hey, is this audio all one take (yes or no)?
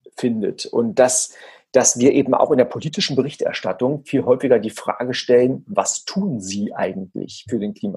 yes